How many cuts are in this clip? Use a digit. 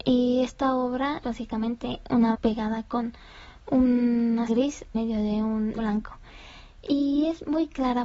5